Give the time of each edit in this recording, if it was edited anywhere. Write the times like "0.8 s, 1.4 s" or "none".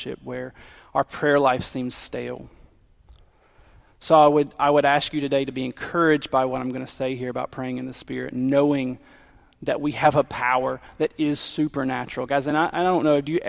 none